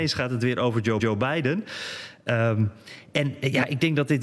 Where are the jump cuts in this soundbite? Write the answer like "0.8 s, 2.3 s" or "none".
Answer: 1.0 s